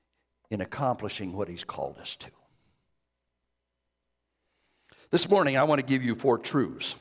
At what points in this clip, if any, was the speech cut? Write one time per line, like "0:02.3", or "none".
none